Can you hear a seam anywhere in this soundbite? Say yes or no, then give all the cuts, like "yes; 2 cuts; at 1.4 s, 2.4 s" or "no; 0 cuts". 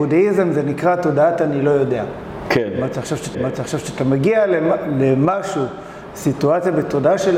yes; 1 cut; at 3.3 s